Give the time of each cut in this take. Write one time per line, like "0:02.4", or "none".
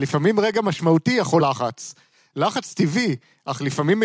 0:01.4